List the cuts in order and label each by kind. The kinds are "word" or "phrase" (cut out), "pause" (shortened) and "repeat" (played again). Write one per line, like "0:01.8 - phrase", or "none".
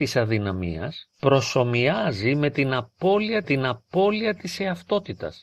0:01.1 - pause
0:03.4 - repeat